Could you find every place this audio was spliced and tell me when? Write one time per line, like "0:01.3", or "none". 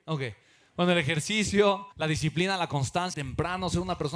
0:01.9
0:03.1